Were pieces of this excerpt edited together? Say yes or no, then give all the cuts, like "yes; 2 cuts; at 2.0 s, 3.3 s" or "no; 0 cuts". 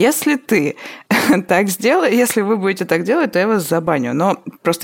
no; 0 cuts